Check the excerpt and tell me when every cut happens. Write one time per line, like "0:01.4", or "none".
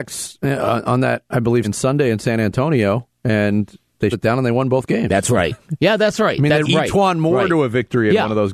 0:01.6
0:04.1
0:06.6